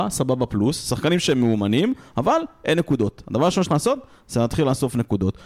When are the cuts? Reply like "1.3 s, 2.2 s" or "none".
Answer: 3.7 s